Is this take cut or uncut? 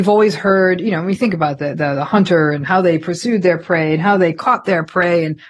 uncut